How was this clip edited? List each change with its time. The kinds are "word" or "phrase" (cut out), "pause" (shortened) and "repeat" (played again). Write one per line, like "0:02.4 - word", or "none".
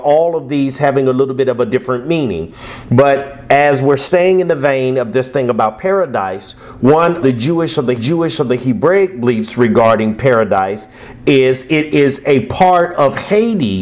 0:07.2 - word
0:08.0 - repeat